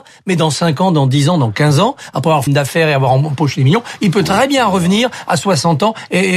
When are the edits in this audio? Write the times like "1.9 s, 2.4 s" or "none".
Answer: 2.5 s